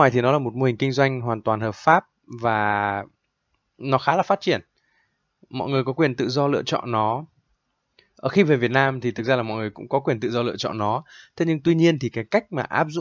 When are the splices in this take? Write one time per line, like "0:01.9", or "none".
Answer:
none